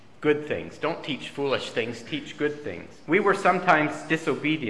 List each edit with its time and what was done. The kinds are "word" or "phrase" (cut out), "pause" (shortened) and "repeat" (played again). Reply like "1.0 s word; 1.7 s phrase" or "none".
3.0 s pause